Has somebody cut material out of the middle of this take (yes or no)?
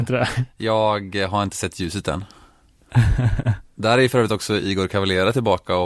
no